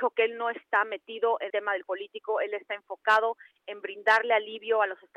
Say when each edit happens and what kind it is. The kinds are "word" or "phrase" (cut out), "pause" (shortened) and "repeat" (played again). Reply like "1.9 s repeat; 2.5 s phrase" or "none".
1.5 s word; 1.8 s word; 3.6 s word